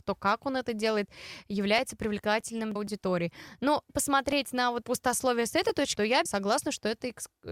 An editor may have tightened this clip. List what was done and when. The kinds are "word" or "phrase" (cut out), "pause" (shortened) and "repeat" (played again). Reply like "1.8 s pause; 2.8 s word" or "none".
2.8 s word; 3.9 s word; 4.8 s word; 6.0 s word; 6.3 s word